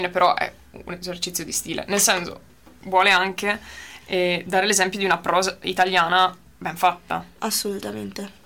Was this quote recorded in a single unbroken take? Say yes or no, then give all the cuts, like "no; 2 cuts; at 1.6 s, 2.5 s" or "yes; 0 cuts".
yes; 0 cuts